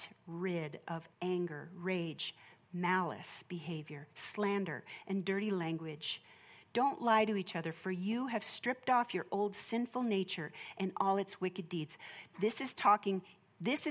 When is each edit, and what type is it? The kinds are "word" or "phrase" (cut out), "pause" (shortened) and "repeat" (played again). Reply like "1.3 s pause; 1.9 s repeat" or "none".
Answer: 1.1 s pause